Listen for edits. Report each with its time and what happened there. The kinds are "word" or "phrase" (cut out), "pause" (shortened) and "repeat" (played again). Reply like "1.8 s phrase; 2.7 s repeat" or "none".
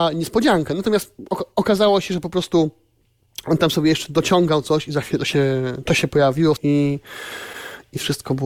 5.9 s word; 6.6 s word